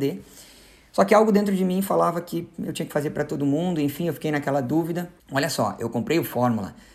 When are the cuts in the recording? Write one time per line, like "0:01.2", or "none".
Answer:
0:05.2